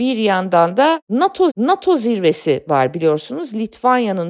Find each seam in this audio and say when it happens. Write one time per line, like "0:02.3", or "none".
0:01.5